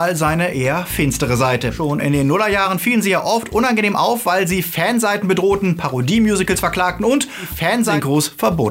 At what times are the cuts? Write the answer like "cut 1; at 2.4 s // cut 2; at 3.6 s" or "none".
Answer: none